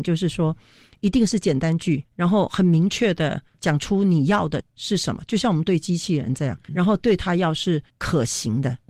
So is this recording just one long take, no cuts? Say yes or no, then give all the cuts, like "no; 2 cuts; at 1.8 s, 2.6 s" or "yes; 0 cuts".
no; 2 cuts; at 2.1 s, 6.7 s